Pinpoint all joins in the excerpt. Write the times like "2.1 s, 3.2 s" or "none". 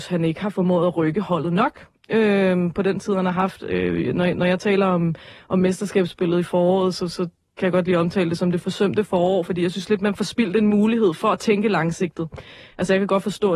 none